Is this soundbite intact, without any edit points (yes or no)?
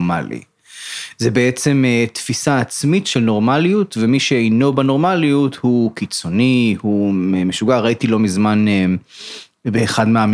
yes